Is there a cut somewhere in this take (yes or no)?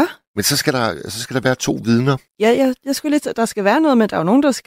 yes